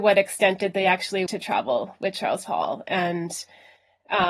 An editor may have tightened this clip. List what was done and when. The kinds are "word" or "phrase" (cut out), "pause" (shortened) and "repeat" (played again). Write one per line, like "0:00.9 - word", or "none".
0:01.3 - word
0:02.5 - word